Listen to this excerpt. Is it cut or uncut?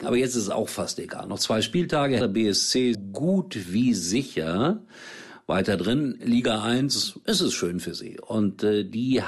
cut